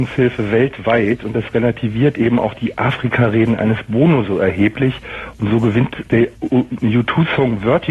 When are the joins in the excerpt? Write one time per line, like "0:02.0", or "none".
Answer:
0:06.3